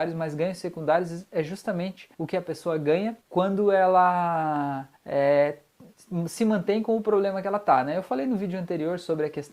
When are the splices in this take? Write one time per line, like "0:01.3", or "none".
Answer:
0:02.1
0:03.2
0:05.0